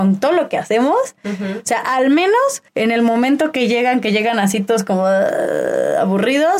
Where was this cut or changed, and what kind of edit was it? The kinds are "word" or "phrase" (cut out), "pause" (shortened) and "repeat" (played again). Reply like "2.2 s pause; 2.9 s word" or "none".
2.7 s pause